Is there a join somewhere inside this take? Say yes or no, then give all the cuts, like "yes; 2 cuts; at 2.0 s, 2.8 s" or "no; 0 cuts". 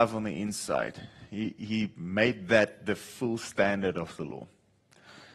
no; 0 cuts